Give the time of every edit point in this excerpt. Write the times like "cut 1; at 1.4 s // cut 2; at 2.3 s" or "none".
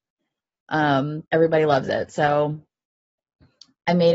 cut 1; at 1.3 s